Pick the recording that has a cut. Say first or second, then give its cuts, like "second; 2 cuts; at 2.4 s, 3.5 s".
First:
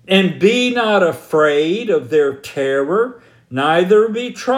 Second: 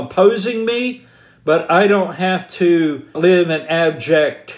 second; 1 cut; at 3.1 s